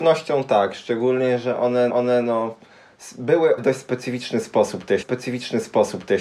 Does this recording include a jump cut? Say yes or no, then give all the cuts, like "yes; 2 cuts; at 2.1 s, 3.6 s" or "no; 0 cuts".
yes; 3 cuts; at 1.9 s, 3.6 s, 5.0 s